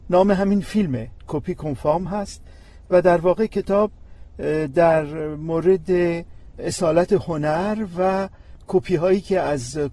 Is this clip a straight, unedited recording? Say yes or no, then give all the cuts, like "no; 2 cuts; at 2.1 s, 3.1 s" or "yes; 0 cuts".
yes; 0 cuts